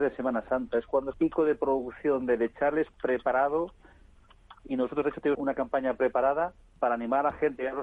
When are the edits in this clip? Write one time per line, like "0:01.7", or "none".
0:01.1
0:05.3
0:06.6